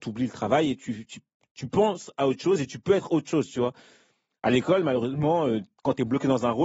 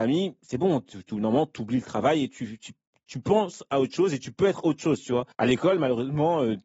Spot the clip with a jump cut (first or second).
second